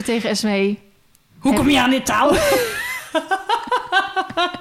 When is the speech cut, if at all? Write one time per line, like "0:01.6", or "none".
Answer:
none